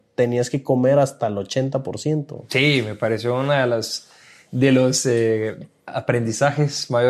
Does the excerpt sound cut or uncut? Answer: uncut